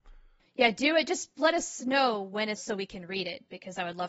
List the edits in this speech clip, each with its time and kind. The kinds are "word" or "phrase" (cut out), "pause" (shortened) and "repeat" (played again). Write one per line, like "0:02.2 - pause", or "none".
0:02.6 - word